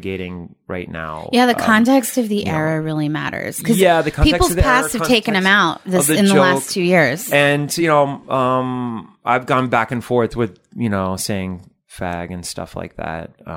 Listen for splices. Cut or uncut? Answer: uncut